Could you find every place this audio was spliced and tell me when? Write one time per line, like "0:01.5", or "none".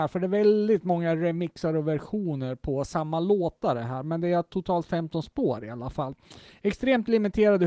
none